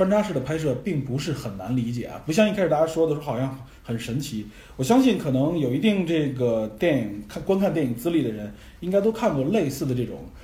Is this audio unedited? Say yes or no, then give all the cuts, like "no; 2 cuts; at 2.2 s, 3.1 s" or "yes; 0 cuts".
yes; 0 cuts